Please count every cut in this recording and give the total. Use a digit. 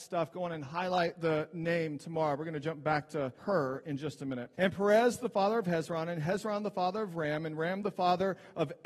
2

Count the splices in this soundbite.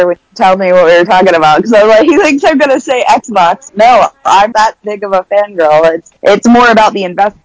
3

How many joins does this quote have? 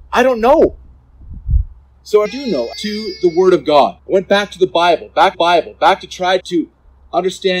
6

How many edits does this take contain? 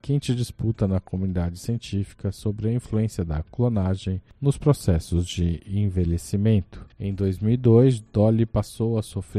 1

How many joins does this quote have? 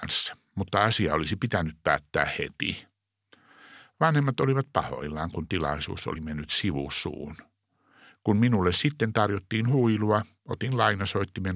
0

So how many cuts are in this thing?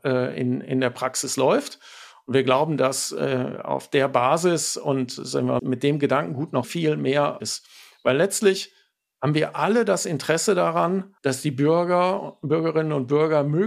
4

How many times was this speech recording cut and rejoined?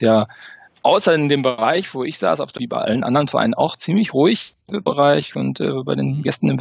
2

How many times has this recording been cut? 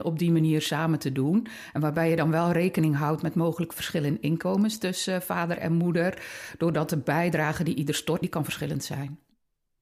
1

